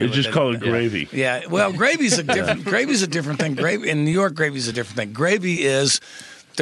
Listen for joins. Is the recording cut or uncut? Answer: uncut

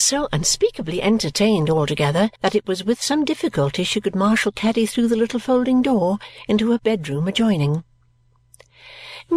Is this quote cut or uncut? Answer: cut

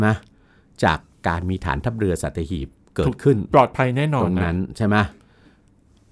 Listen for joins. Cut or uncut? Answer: uncut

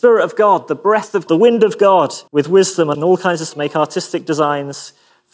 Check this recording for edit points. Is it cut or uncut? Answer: cut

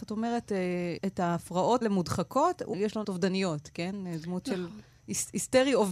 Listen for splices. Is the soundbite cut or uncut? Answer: cut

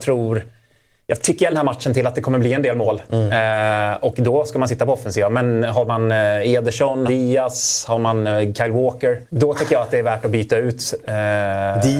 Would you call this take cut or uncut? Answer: cut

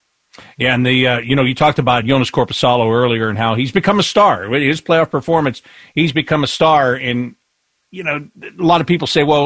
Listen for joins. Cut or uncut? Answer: uncut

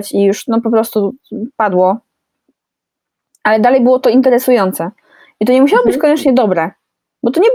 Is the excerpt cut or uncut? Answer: uncut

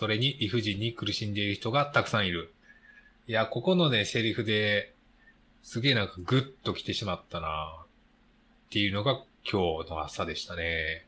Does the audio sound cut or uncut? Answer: uncut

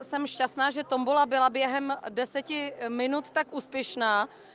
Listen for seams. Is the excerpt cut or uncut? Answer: uncut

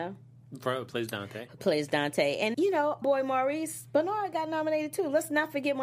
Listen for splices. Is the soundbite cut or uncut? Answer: cut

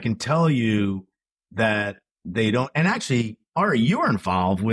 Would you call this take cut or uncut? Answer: uncut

